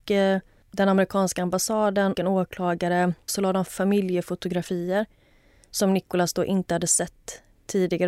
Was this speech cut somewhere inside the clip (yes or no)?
yes